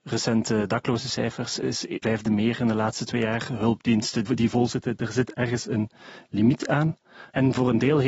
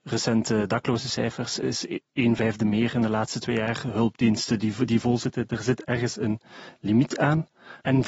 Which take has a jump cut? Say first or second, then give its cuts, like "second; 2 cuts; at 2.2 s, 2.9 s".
first; 2 cuts; at 2.0 s, 4.3 s